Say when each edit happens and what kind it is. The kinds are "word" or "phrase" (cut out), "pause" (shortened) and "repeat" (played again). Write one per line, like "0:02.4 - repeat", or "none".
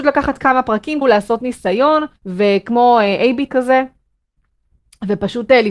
0:01.0 - word
0:02.2 - pause
0:03.5 - word